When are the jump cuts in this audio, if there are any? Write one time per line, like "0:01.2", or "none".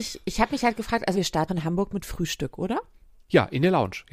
0:01.1
0:01.5